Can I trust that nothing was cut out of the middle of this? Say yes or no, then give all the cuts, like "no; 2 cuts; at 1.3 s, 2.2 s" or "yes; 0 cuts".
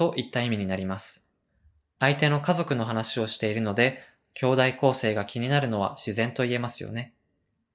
yes; 0 cuts